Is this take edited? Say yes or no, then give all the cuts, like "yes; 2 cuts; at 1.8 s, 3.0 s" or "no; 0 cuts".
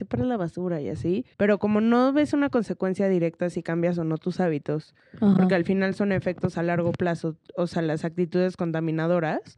yes; 2 cuts; at 1.3 s, 7.5 s